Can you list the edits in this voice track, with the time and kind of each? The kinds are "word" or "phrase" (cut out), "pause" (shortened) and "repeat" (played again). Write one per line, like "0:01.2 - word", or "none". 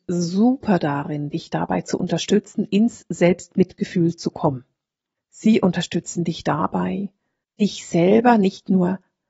none